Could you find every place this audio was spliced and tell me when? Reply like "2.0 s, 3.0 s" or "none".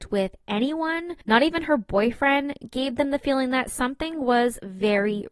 1.2 s